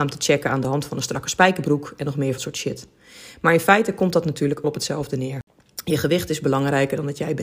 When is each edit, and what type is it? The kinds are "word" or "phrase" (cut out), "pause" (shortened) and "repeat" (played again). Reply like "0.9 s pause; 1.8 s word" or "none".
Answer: 2.4 s word; 4.6 s word